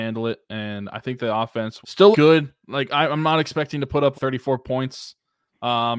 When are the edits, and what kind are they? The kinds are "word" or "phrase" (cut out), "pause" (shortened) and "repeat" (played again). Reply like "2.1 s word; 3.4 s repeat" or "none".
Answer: 1.8 s word; 2.1 s word; 4.1 s word